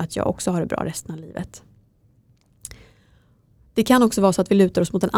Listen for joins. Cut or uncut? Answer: uncut